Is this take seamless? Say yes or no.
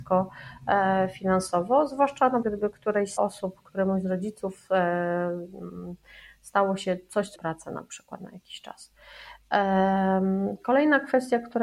no